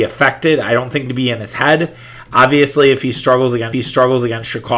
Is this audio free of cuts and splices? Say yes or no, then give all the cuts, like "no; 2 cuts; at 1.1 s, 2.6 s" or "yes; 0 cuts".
no; 2 cuts; at 1.1 s, 3.7 s